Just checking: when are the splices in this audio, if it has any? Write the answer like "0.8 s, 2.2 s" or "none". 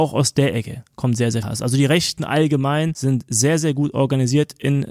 1.4 s